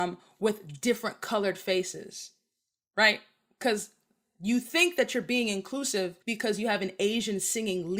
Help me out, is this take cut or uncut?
cut